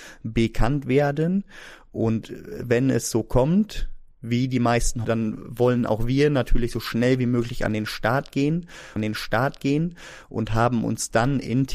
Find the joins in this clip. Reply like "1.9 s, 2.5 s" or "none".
4.1 s, 5.0 s, 9.0 s